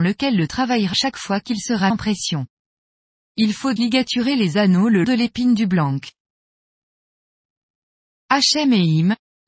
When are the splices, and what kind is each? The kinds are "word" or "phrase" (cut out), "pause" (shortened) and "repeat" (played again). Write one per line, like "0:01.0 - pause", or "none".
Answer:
0:00.9 - word
0:01.9 - word
0:03.8 - word
0:05.0 - word